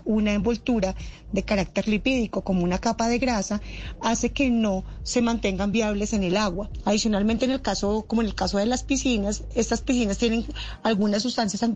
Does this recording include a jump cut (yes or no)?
no